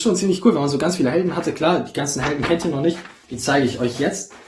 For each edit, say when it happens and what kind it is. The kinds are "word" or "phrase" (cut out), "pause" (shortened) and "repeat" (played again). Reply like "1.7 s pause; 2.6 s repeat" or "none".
none